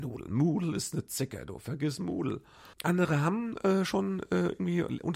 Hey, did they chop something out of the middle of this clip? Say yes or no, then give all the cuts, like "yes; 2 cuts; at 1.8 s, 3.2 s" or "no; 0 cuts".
yes; 1 cut; at 2.7 s